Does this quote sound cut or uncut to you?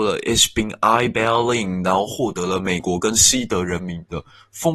uncut